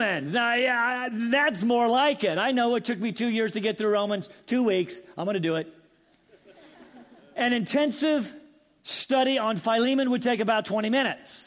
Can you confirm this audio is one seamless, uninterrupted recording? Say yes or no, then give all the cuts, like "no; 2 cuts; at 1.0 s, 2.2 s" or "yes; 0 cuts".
yes; 0 cuts